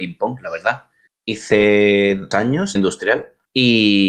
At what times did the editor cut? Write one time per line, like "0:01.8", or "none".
0:02.3
0:02.8